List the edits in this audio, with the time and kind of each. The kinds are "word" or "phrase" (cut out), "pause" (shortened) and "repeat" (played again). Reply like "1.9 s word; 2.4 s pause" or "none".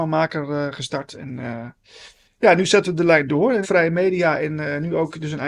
2.3 s pause; 3.6 s phrase